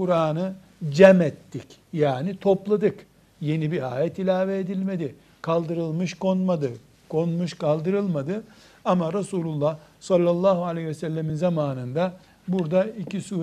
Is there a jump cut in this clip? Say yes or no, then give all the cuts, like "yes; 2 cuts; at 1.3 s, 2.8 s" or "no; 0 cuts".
no; 0 cuts